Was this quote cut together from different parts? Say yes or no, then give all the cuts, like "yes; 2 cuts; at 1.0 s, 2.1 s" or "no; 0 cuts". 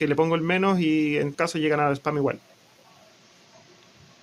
yes; 1 cut; at 1.3 s